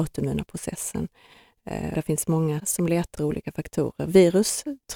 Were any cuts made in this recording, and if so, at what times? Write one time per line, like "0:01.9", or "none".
0:01.9
0:02.6
0:03.1